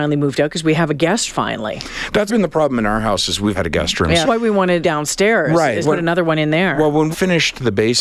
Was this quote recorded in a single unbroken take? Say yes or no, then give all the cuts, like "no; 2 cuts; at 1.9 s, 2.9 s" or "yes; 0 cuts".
no; 7 cuts; at 1.3 s, 2.3 s, 3.5 s, 4.2 s, 4.8 s, 5.8 s, 7.1 s